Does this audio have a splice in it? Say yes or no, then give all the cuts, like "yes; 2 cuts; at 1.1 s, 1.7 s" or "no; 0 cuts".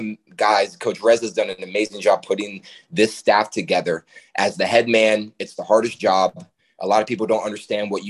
no; 0 cuts